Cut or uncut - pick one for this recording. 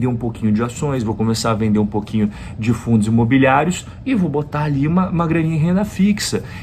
uncut